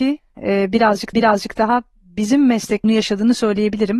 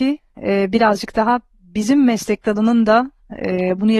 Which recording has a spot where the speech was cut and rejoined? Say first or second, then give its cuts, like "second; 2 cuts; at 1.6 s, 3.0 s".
first; 2 cuts; at 1.1 s, 2.8 s